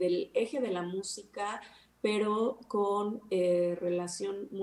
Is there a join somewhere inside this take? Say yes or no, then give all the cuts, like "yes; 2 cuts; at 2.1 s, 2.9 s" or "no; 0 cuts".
no; 0 cuts